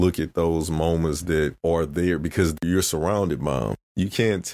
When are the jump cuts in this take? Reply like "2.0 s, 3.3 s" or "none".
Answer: none